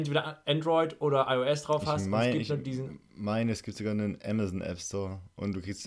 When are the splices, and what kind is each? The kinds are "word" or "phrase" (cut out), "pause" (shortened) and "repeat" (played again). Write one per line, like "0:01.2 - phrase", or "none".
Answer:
none